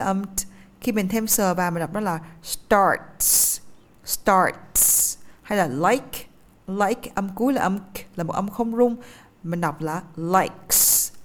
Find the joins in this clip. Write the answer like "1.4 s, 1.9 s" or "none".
none